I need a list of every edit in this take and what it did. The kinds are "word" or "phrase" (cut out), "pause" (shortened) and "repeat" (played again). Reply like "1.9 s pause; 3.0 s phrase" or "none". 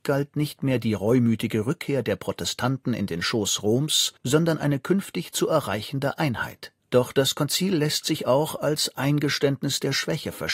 4.2 s pause; 6.8 s pause